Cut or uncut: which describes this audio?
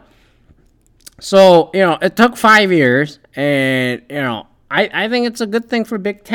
uncut